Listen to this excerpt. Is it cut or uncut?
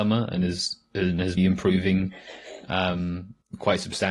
cut